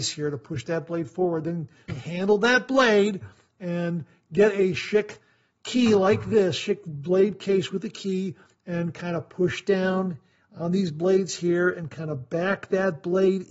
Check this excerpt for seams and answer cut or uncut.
cut